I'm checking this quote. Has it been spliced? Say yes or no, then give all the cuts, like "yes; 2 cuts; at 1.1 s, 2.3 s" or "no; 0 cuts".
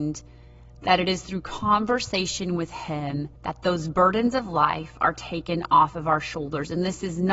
yes; 1 cut; at 3.4 s